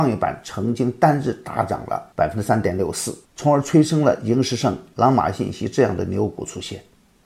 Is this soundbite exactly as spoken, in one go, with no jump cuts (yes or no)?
no